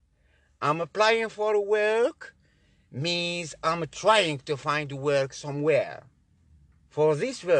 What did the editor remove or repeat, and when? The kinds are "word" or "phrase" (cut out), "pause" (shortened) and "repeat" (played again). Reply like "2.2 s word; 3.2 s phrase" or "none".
none